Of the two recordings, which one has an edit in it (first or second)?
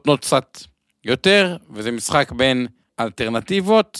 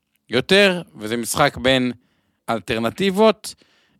first